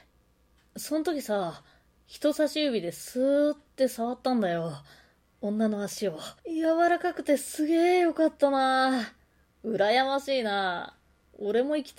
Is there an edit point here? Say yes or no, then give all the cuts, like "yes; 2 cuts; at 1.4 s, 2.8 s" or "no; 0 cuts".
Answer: yes; 1 cut; at 6.4 s